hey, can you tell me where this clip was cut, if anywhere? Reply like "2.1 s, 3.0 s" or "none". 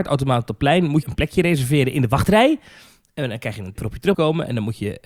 1.0 s, 3.8 s, 4.1 s